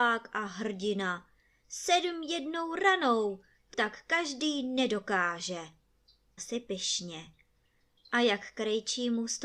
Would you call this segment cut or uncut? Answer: cut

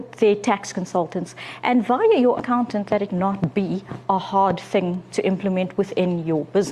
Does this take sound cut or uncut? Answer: cut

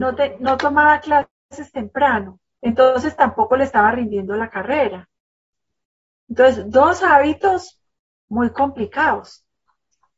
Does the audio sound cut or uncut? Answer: uncut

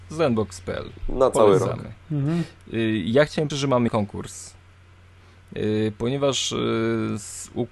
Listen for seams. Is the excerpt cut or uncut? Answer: cut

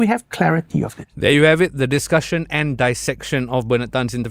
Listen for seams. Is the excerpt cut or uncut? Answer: cut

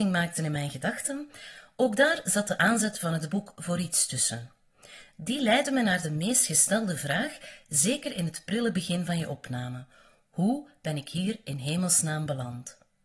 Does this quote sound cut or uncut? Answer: uncut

